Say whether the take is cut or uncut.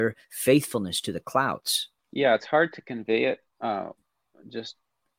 cut